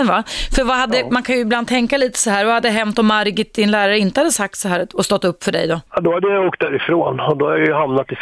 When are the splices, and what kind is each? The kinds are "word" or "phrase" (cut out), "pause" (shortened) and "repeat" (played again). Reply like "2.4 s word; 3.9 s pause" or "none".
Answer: 5.9 s pause